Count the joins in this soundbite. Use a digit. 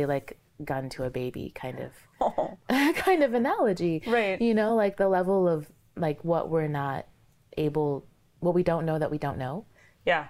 0